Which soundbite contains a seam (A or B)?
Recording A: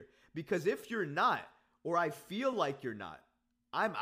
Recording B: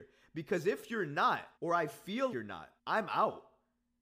B